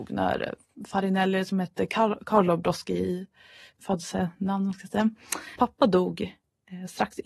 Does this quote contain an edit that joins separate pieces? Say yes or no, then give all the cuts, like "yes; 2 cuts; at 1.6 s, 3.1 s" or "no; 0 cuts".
yes; 1 cut; at 5.6 s